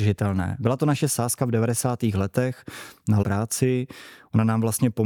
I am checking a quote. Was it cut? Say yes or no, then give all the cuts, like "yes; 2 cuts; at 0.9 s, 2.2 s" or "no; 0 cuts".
yes; 1 cut; at 3.2 s